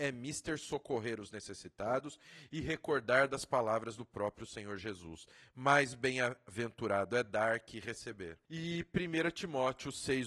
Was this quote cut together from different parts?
no; 0 cuts

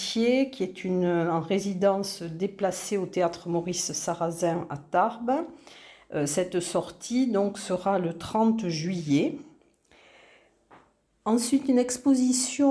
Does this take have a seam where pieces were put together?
no; 0 cuts

